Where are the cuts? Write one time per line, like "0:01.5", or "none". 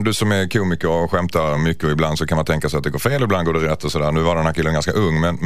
none